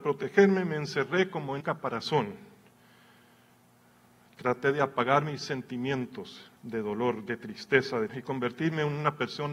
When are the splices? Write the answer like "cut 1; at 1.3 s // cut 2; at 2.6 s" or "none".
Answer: cut 1; at 1.6 s // cut 2; at 6.6 s // cut 3; at 8.1 s

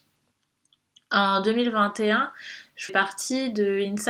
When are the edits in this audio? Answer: cut 1; at 2.9 s

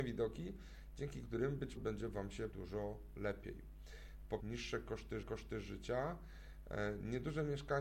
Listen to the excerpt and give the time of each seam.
cut 1; at 1.8 s // cut 2; at 2.5 s // cut 3; at 4.4 s // cut 4; at 5.2 s

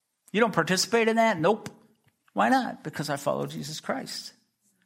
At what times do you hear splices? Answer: none

